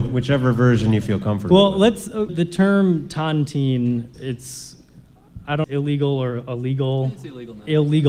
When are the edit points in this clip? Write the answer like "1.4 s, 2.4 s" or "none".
2.3 s, 4.1 s, 5.6 s